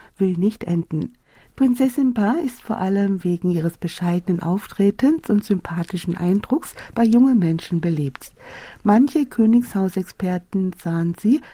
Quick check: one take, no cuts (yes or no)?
yes